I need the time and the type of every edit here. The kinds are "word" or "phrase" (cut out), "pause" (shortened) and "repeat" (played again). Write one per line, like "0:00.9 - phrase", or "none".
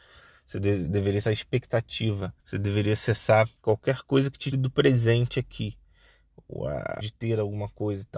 0:01.2 - word
0:02.4 - pause
0:03.6 - pause
0:04.5 - word
0:07.0 - word